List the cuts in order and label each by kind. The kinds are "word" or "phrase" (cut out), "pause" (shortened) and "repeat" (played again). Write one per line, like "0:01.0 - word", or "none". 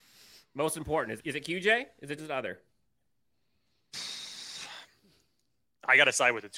0:01.2 - word
0:02.2 - phrase